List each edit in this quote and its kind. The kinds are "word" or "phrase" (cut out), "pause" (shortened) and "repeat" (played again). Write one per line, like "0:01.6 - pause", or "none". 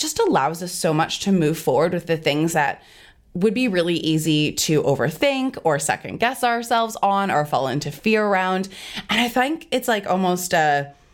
none